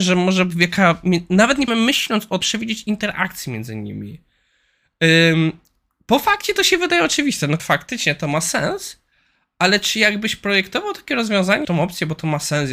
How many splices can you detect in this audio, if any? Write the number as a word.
four